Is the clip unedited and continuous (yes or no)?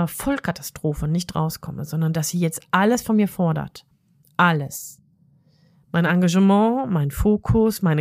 yes